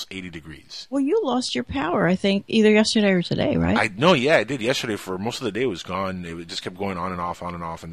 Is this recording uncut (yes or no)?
yes